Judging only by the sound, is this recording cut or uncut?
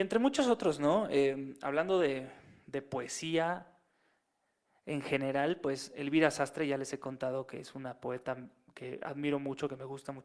uncut